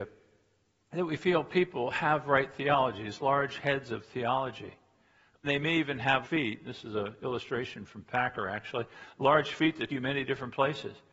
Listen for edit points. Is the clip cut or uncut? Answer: cut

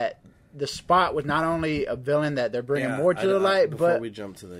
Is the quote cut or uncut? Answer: uncut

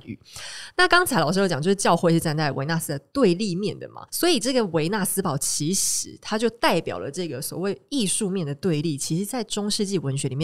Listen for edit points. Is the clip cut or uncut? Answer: cut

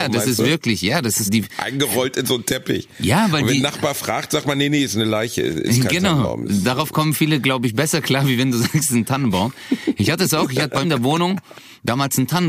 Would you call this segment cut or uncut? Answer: cut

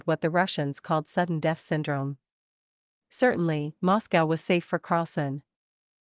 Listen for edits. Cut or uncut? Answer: uncut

